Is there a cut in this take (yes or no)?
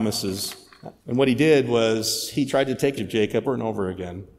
yes